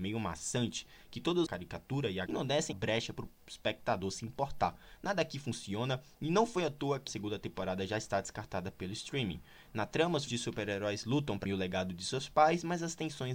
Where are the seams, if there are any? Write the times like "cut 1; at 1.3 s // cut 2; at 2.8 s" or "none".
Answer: cut 1; at 1.5 s // cut 2; at 2.3 s // cut 3; at 2.7 s // cut 4; at 7.1 s // cut 5; at 10.3 s // cut 6; at 11.5 s